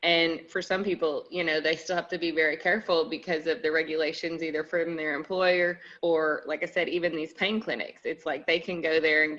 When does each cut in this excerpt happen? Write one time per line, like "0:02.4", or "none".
0:06.0